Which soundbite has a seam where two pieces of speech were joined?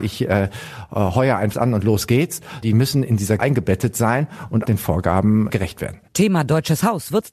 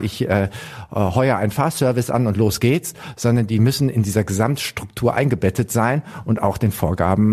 first; 5 cuts; at 1.5 s, 2.6 s, 3.4 s, 4.7 s, 5.5 s

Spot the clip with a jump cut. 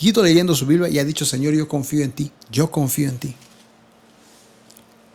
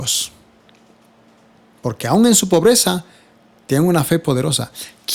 first; 1 cut; at 2.4 s

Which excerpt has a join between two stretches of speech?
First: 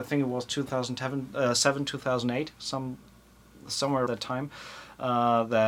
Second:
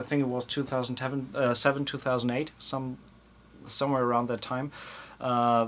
first; 1 cut; at 4.1 s

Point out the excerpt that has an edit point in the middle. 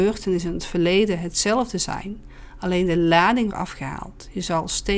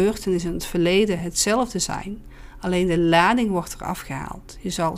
first; 1 cut; at 3.5 s

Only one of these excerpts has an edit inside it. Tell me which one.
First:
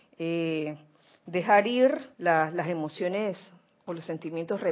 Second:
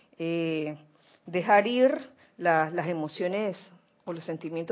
first; 1 cut; at 2.1 s

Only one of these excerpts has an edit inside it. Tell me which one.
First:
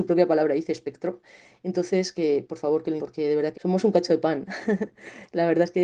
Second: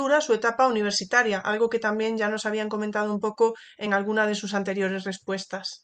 first; 2 cuts; at 3.0 s, 3.5 s

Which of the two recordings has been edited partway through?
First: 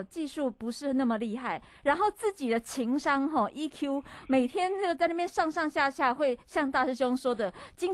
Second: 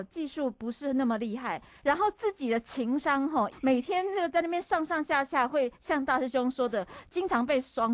second; 1 cut; at 3.5 s

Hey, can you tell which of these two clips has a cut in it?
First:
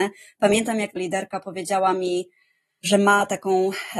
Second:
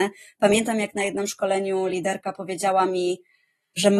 first; 1 cut; at 1.0 s

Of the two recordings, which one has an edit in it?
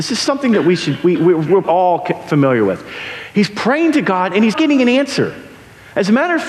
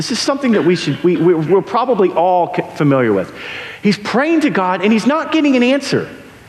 first; 2 cuts; at 1.6 s, 4.5 s

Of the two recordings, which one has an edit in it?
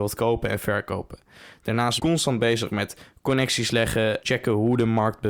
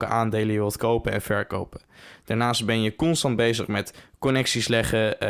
first; 2 cuts; at 2.0 s, 4.2 s

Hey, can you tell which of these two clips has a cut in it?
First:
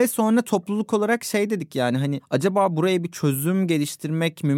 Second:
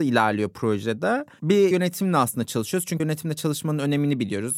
second; 2 cuts; at 1.7 s, 3.0 s

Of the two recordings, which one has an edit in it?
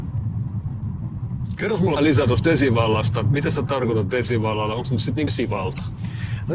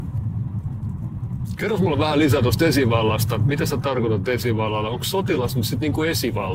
first; 3 cuts; at 2.0 s, 4.8 s, 5.3 s

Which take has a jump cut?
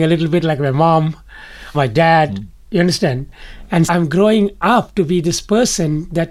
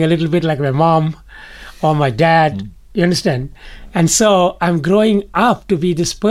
first; 2 cuts; at 1.7 s, 3.9 s

